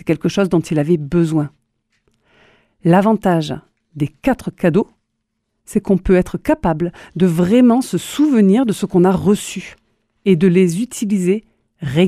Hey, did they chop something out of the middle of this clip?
no; 0 cuts

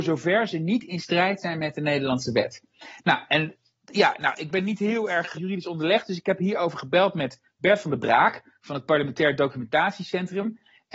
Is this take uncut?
no; 1 cut; at 5.3 s

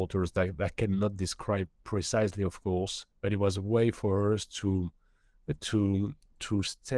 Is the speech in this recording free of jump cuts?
no; 1 cut; at 3.1 s

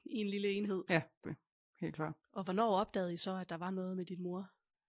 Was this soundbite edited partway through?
yes; 2 cuts; at 1.2 s, 2.2 s

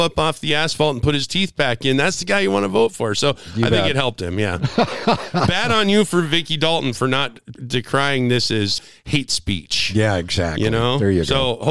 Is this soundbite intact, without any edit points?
yes; 0 cuts

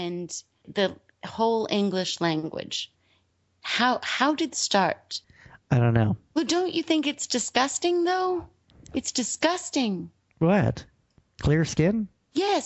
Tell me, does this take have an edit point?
yes; 1 cut; at 4.5 s

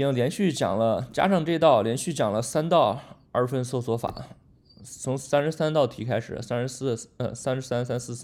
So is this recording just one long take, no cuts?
yes; 0 cuts

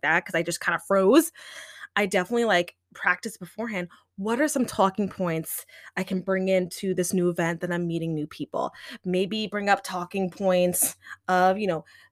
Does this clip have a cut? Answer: no; 0 cuts

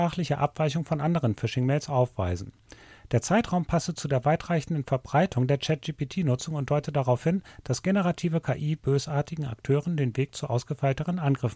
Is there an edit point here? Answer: no; 0 cuts

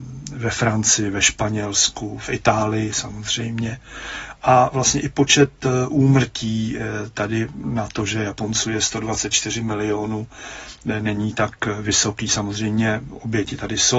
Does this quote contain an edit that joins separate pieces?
no; 0 cuts

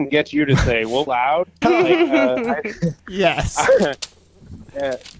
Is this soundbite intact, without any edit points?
no; 3 cuts; at 1.1 s, 1.6 s, 3.0 s

